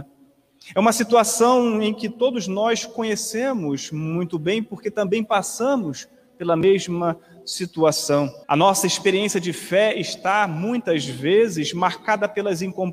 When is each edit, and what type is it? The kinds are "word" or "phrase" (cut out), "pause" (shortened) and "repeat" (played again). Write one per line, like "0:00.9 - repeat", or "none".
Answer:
0:08.4 - pause